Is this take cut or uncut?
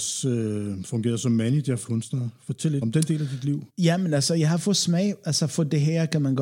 cut